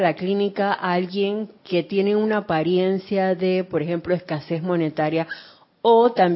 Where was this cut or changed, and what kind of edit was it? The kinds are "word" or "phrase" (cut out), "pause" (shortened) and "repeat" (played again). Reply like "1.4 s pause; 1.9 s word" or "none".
1.6 s pause